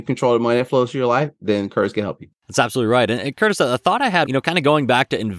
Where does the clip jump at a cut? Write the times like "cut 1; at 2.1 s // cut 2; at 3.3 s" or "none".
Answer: cut 1; at 2.3 s // cut 2; at 4.2 s